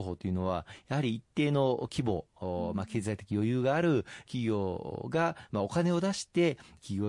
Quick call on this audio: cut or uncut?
uncut